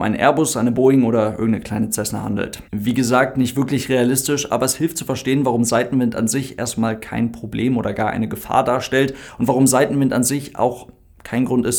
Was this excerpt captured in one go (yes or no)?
no